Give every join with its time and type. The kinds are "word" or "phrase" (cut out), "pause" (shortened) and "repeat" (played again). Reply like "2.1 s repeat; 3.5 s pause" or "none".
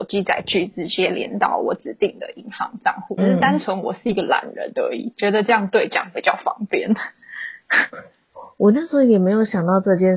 3.2 s word